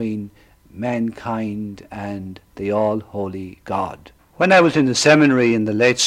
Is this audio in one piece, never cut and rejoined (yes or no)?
no